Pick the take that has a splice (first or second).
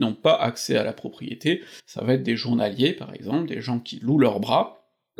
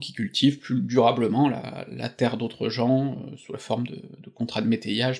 first